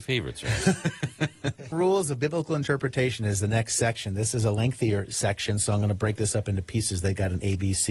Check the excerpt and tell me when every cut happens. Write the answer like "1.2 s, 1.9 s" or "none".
1.7 s

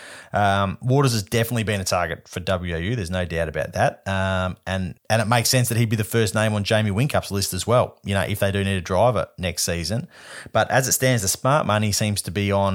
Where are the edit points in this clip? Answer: 5.0 s

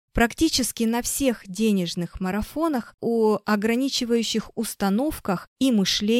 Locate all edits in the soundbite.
3.0 s

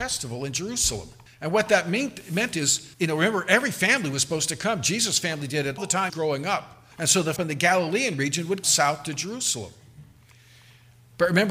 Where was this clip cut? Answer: 1.3 s, 2.9 s, 5.8 s, 6.1 s, 6.9 s, 7.4 s, 8.6 s

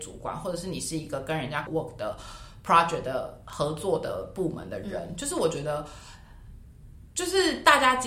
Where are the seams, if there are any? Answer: 1.7 s

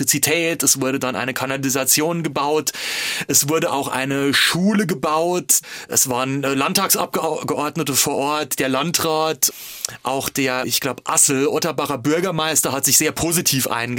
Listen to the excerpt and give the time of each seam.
10.6 s

